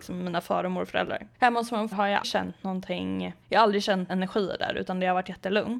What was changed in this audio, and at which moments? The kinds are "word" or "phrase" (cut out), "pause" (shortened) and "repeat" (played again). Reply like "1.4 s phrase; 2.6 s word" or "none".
1.3 s pause; 1.9 s word; 2.2 s word; 3.4 s pause; 4.1 s word